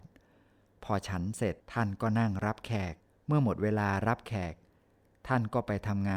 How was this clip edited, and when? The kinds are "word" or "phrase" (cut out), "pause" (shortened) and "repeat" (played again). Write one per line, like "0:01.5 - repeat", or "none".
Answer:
0:01.6 - pause
0:03.1 - pause